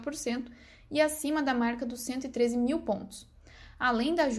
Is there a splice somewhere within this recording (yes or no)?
no